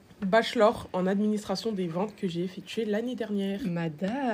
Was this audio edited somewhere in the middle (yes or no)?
no